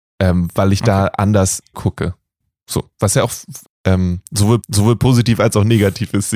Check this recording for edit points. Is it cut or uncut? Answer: cut